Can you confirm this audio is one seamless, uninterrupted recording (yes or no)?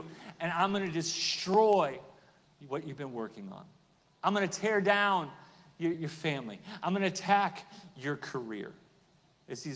no